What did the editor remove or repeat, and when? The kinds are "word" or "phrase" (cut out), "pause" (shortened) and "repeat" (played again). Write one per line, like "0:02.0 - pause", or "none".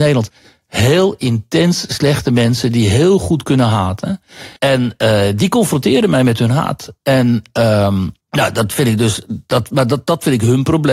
0:04.6 - pause
0:08.2 - pause